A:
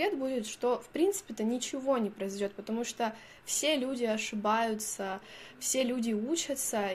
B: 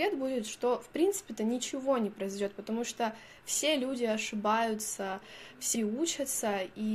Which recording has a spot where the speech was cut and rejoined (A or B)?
B